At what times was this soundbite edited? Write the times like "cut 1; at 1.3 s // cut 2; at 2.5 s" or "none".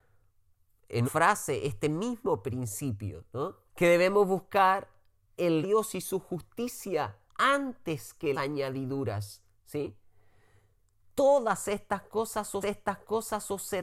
cut 1; at 1.0 s // cut 2; at 3.7 s // cut 3; at 5.6 s // cut 4; at 7.3 s // cut 5; at 8.3 s // cut 6; at 12.6 s